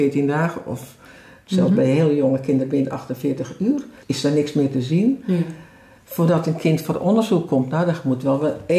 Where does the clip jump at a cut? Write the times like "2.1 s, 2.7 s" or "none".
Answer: 4.0 s